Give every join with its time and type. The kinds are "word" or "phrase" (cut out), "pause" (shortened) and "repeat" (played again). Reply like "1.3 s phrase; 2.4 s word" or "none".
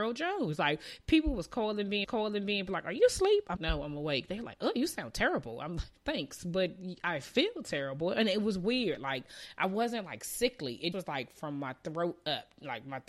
2.0 s repeat; 3.6 s word; 6.0 s pause; 10.9 s word